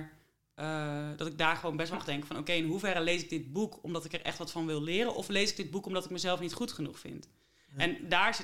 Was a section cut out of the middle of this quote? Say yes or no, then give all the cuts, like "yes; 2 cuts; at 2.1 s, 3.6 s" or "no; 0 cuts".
yes; 1 cut; at 1.9 s